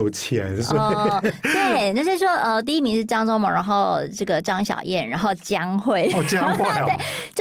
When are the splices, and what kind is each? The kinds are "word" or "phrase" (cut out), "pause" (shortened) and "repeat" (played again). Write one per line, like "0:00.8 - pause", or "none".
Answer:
none